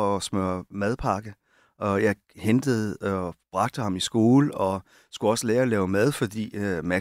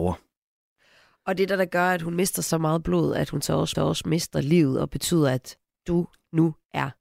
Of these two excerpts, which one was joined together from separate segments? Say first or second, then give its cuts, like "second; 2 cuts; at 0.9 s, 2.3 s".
second; 1 cut; at 3.7 s